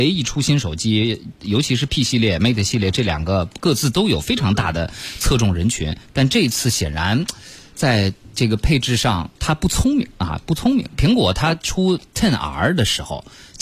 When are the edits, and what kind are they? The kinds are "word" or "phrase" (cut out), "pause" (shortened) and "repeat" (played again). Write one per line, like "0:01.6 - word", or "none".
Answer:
0:09.4 - pause
0:12.1 - pause